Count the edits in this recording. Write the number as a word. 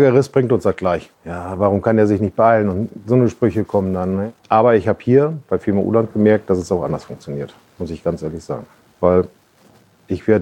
three